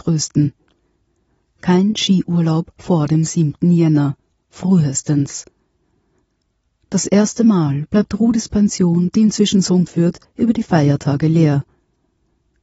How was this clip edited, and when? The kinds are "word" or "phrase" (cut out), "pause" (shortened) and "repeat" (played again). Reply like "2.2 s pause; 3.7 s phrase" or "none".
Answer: 9.9 s word